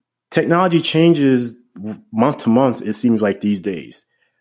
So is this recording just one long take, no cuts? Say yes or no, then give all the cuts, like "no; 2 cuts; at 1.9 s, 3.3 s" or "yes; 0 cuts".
yes; 0 cuts